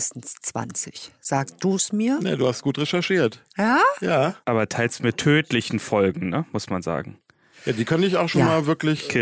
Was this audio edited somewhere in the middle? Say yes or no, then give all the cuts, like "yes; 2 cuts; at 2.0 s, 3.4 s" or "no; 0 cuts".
yes; 2 cuts; at 3.5 s, 4.4 s